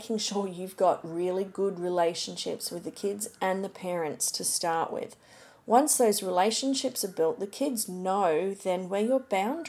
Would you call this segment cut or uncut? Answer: uncut